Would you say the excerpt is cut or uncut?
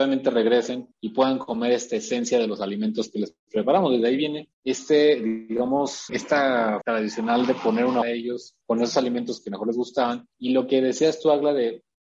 cut